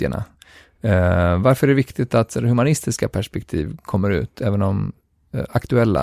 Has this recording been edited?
no; 0 cuts

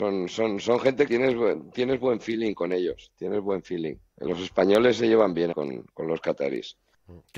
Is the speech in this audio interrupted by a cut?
yes; 2 cuts; at 1.1 s, 5.5 s

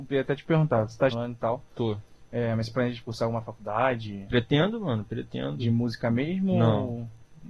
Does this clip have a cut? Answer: yes; 1 cut; at 1.1 s

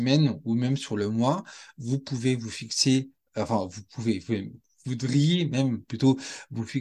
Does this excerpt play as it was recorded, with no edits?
yes; 0 cuts

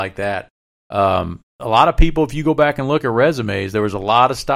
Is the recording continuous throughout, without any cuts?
yes; 0 cuts

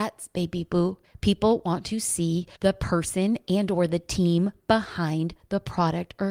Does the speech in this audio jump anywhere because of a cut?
yes; 2 cuts; at 1.0 s, 2.5 s

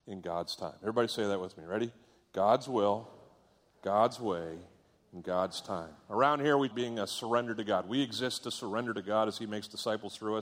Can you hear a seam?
yes; 1 cut; at 6.7 s

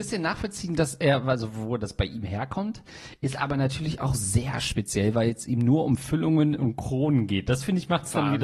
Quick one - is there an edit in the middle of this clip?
no; 0 cuts

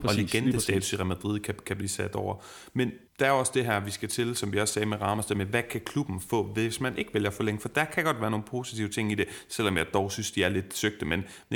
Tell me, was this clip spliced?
yes; 1 cut; at 3.1 s

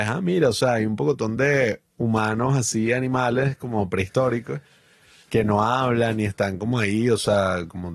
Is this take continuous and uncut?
yes; 0 cuts

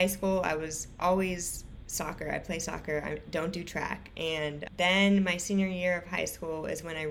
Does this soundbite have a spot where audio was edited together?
no; 0 cuts

